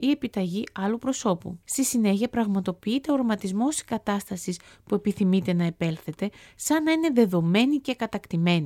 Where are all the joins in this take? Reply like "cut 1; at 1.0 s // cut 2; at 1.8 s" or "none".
cut 1; at 1.6 s